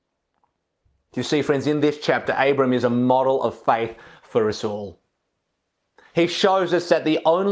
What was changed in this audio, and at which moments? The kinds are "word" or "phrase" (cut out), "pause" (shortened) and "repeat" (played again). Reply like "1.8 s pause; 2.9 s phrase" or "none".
none